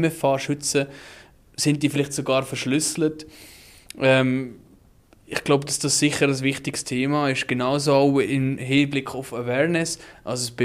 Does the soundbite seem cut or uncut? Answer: uncut